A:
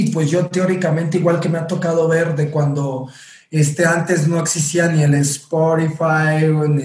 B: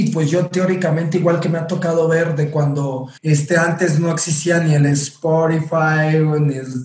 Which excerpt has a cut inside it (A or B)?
B